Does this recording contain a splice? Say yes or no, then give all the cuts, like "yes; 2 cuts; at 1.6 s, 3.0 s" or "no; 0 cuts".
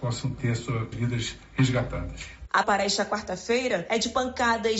yes; 2 cuts; at 0.9 s, 2.6 s